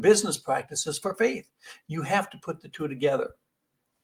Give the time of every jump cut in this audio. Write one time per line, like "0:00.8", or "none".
none